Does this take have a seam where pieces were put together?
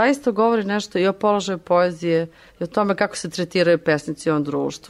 no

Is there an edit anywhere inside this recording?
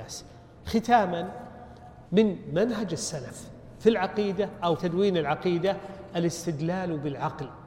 yes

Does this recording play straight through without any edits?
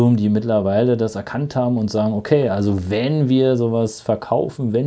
yes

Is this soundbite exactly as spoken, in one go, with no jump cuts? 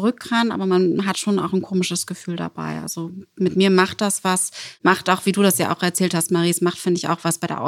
yes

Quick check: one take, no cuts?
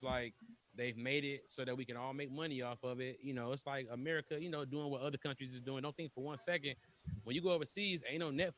yes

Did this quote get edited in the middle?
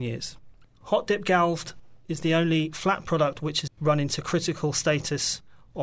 yes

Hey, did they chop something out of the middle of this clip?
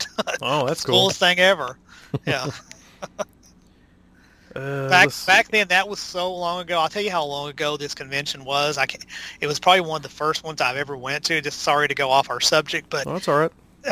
no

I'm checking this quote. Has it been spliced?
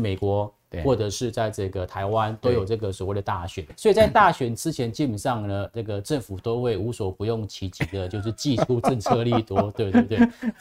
yes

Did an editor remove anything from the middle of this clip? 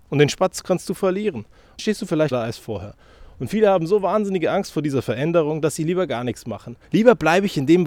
yes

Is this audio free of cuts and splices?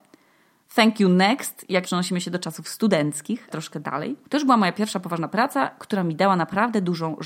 no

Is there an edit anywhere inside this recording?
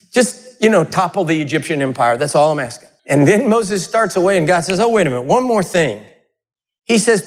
yes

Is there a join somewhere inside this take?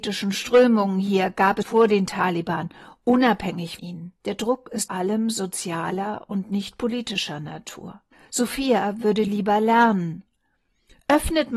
yes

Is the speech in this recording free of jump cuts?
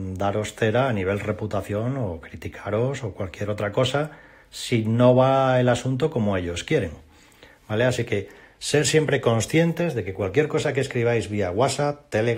yes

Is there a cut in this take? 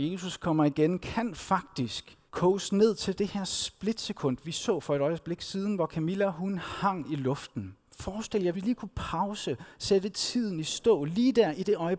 yes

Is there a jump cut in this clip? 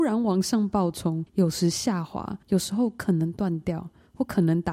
yes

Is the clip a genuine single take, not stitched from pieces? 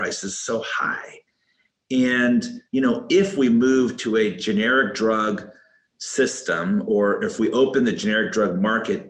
no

